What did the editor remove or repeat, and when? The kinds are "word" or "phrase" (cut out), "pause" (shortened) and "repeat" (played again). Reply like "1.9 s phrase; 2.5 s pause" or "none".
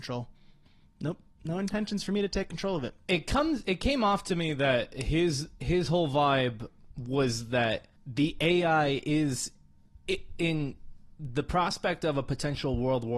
6.9 s pause; 8.0 s pause